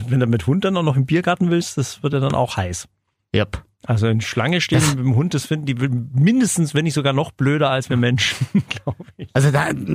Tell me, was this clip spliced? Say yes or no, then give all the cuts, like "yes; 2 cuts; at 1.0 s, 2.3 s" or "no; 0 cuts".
no; 0 cuts